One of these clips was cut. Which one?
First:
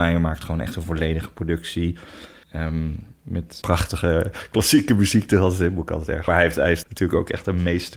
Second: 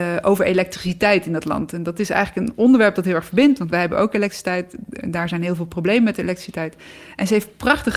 first; 4 cuts; at 2.4 s, 3.6 s, 6.3 s, 6.8 s

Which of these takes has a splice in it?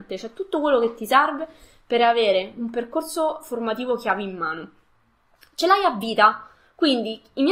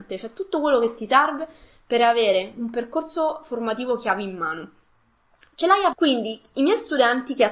second; 1 cut; at 5.9 s

